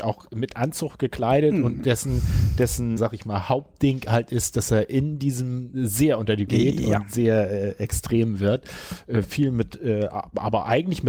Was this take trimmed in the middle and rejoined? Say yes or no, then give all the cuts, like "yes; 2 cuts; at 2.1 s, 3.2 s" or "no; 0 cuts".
yes; 2 cuts; at 3.0 s, 6.5 s